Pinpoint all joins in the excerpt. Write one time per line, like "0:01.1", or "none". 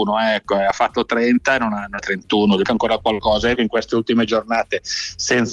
0:02.0
0:02.6
0:03.6